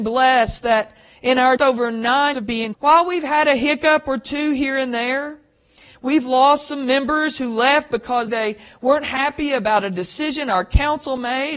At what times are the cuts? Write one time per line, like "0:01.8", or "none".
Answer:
0:01.6
0:02.3
0:02.7
0:08.3

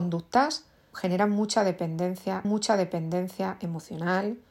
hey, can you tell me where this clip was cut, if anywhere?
0:00.9
0:02.4

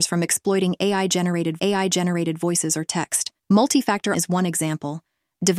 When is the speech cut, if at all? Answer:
0:01.6
0:03.4
0:04.1

